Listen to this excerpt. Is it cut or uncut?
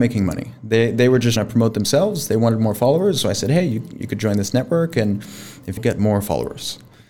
cut